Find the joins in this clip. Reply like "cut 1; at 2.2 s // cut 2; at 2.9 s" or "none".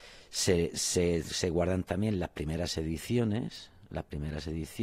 none